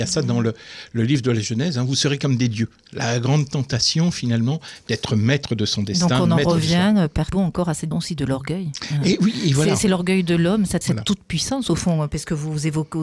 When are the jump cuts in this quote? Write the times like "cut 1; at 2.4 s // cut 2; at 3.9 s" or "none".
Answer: cut 1; at 7.3 s // cut 2; at 7.9 s // cut 3; at 10.8 s